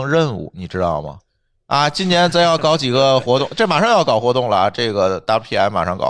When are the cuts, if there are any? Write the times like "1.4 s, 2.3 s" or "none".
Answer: none